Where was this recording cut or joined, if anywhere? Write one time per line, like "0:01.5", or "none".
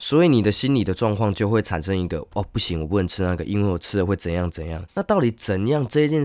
0:04.9